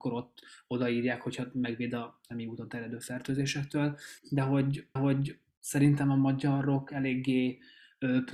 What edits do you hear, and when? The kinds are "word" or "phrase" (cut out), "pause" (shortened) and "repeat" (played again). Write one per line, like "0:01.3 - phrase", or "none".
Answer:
0:04.2 - pause
0:05.0 - repeat